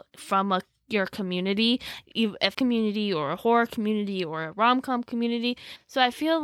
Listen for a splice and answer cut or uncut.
cut